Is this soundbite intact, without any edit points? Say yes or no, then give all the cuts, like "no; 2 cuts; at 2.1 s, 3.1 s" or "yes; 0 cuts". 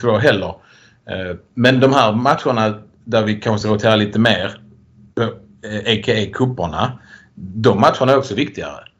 yes; 0 cuts